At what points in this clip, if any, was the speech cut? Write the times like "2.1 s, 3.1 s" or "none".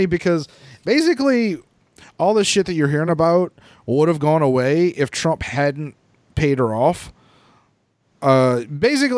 none